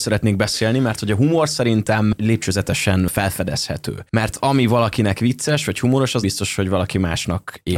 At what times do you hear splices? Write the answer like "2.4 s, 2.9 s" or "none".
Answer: 6.2 s